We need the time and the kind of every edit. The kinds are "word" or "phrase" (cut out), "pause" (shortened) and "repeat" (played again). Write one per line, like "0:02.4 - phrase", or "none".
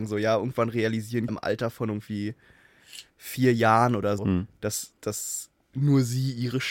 0:01.3 - word
0:03.1 - pause
0:04.2 - word
0:05.6 - pause